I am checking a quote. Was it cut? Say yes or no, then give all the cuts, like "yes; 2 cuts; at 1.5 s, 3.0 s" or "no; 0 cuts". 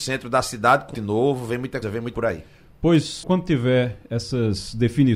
yes; 4 cuts; at 0.9 s, 1.8 s, 2.1 s, 3.2 s